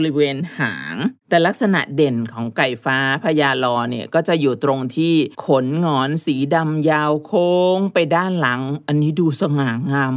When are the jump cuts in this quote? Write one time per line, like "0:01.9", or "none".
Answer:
0:01.2
0:05.3